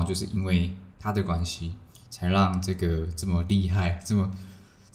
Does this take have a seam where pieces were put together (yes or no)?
yes